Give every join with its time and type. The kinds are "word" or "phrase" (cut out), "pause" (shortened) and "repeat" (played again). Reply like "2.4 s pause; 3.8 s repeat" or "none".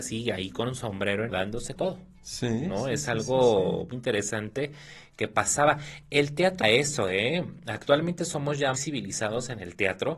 1.3 s word; 1.7 s word; 3.9 s word; 6.6 s word; 8.7 s word